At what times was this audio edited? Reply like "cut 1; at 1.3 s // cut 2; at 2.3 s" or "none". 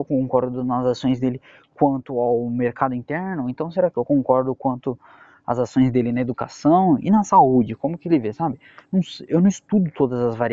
none

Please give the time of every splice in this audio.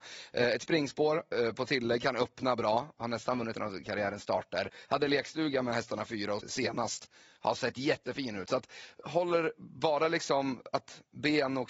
cut 1; at 3.6 s // cut 2; at 6.4 s

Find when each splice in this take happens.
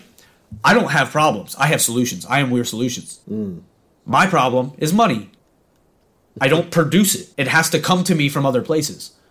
cut 1; at 3.2 s // cut 2; at 5.4 s // cut 3; at 7.3 s

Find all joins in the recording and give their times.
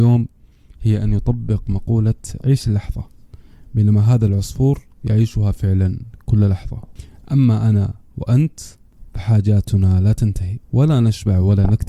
cut 1; at 10.6 s

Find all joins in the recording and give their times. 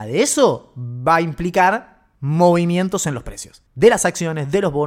cut 1; at 2.2 s // cut 2; at 3.7 s

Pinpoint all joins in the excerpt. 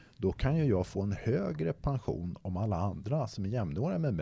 none

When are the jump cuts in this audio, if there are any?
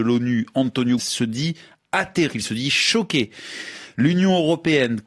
cut 1; at 1.0 s // cut 2; at 2.3 s

